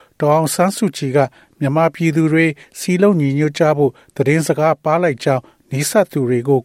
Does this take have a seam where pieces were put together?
no; 0 cuts

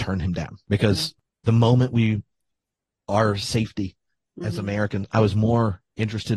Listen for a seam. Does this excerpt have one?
no; 0 cuts

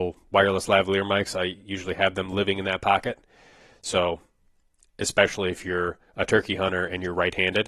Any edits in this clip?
no; 0 cuts

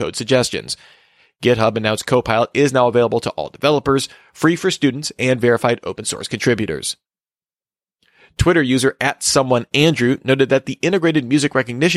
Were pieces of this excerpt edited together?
no; 0 cuts

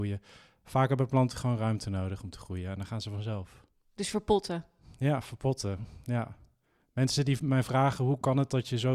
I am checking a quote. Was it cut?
no; 0 cuts

